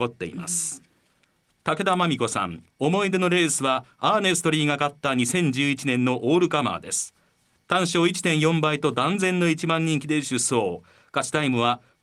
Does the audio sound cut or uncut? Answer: cut